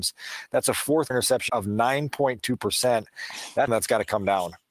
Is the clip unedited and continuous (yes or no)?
no